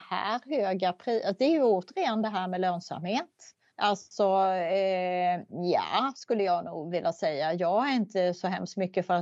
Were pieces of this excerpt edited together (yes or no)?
yes